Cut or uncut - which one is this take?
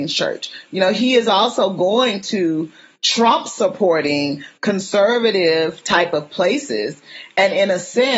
uncut